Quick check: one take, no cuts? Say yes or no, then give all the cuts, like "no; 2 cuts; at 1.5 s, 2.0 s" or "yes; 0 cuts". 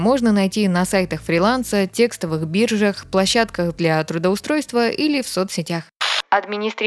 yes; 0 cuts